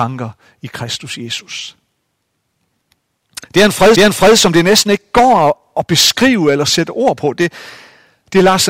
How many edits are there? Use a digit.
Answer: 1